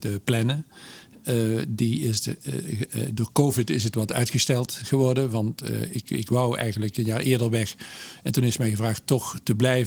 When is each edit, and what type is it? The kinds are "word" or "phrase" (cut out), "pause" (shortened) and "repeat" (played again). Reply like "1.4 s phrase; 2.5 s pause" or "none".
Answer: none

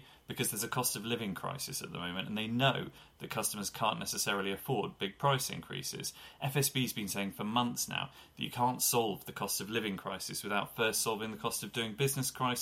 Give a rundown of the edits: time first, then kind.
none

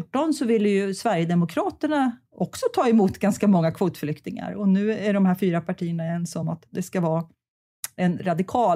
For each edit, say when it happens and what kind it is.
none

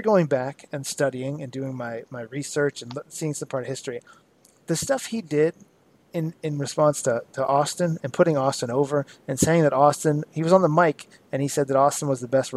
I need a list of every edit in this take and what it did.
none

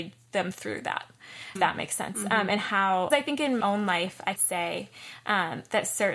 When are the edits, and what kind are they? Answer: 1.6 s word; 3.1 s word; 3.6 s word; 4.4 s word

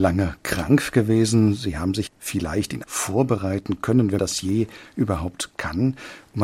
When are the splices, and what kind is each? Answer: 2.1 s phrase; 2.8 s word; 4.2 s word

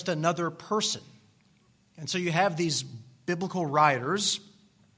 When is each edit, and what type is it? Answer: none

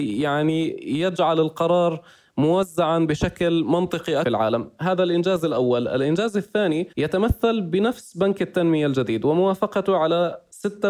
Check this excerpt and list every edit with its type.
4.2 s phrase; 6.9 s pause

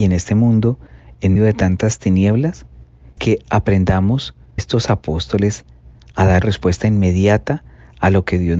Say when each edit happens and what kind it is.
1.4 s word; 3.2 s word; 4.6 s word; 6.4 s word

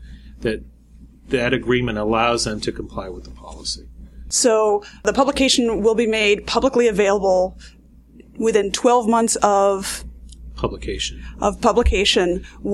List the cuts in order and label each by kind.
none

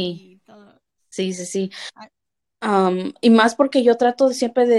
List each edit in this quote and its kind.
none

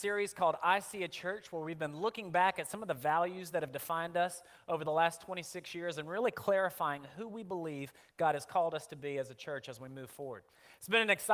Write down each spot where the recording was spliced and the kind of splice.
none

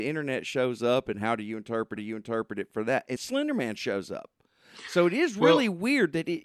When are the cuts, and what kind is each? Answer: 2.0 s repeat; 3.2 s word

